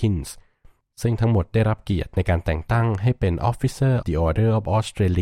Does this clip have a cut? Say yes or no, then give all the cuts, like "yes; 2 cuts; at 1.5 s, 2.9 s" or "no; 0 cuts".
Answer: yes; 1 cut; at 4.0 s